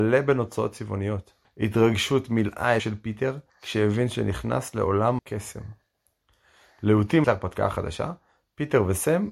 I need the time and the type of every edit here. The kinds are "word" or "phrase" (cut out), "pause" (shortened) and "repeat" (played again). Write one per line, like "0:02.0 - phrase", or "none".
0:01.4 - pause
0:02.8 - phrase
0:03.5 - pause
0:05.2 - word
0:07.2 - word